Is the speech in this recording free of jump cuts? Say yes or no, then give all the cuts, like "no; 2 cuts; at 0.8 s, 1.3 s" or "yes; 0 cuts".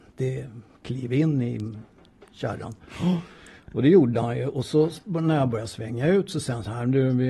yes; 0 cuts